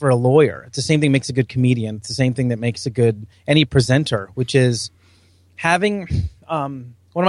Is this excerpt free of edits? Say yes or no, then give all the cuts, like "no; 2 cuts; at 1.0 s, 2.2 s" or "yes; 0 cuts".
yes; 0 cuts